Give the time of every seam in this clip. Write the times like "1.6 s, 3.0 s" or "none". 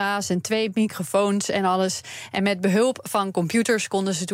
none